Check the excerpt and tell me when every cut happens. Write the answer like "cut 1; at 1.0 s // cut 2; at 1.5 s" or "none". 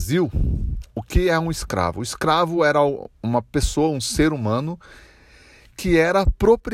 none